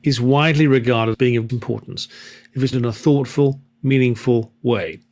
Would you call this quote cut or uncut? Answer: cut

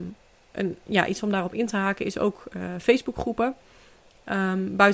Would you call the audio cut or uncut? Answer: uncut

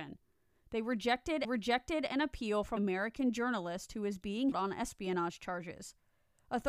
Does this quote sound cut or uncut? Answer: cut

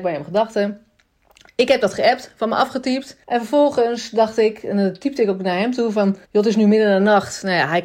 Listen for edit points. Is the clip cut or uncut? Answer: cut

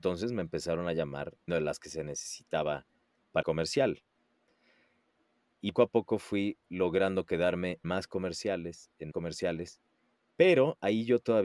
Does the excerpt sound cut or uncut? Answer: cut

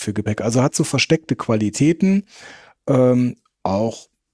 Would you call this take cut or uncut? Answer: uncut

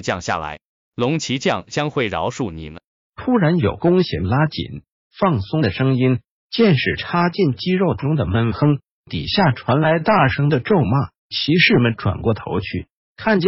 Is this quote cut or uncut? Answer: cut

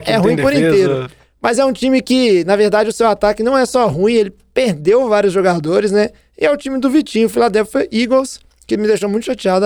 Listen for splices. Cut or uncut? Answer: uncut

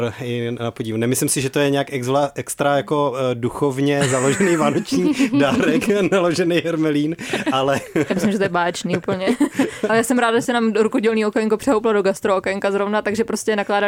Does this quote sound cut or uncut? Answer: cut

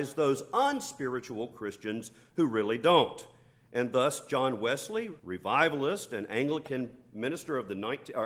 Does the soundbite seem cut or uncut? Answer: cut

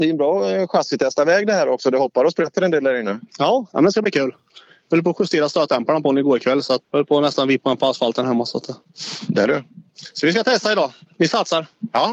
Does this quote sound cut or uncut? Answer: cut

